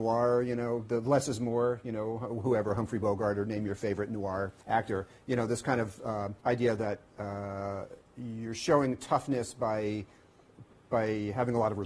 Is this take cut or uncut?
cut